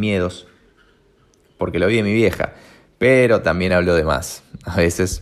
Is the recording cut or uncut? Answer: uncut